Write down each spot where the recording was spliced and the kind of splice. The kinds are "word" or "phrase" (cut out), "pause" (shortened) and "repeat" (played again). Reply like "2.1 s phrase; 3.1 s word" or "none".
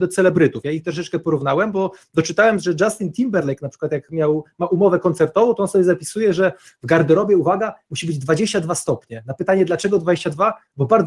none